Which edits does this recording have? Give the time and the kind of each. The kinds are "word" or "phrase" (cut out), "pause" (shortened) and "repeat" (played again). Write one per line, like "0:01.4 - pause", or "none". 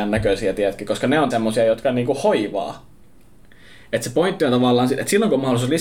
0:01.3 - word